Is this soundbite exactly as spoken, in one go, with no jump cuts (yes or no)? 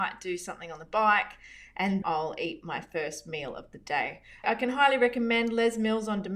no